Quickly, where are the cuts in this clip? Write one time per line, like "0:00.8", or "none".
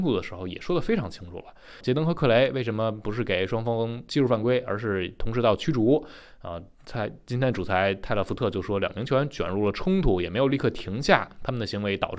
0:01.8